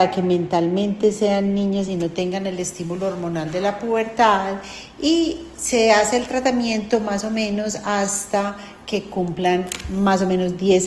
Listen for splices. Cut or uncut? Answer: uncut